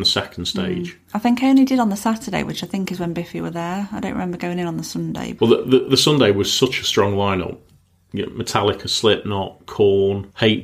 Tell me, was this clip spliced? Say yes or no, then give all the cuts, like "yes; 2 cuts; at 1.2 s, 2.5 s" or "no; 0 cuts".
no; 0 cuts